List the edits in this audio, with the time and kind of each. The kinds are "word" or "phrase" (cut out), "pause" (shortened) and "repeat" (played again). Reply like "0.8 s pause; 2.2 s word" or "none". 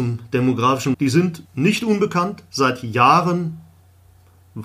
0.9 s word; 1.5 s pause